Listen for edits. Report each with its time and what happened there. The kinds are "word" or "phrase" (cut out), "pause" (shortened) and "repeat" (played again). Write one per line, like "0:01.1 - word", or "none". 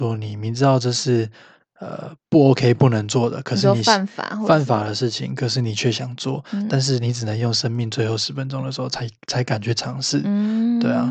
none